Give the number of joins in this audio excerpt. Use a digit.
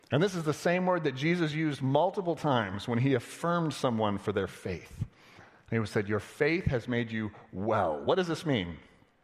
0